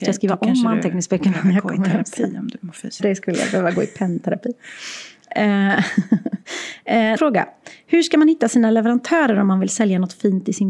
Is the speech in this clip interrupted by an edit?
yes; 2 cuts; at 3.0 s, 7.2 s

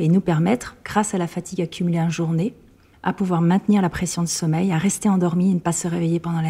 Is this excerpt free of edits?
yes; 0 cuts

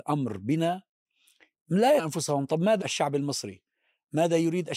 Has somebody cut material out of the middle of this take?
yes; 2 cuts; at 2.0 s, 2.8 s

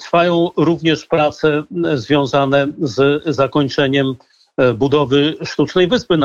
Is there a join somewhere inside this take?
no; 0 cuts

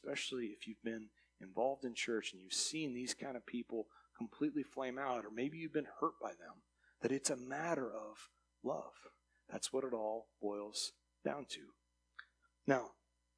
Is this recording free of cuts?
yes; 0 cuts

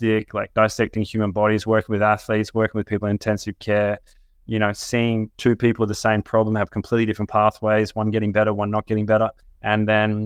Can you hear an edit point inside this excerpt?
no; 0 cuts

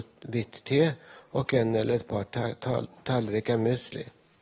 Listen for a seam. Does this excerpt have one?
no; 0 cuts

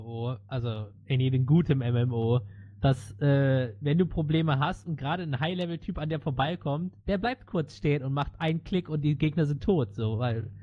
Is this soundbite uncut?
no; 1 cut; at 7.0 s

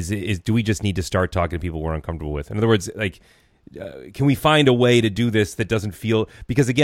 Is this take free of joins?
yes; 0 cuts

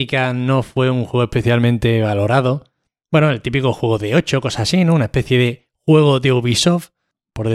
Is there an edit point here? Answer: no; 0 cuts

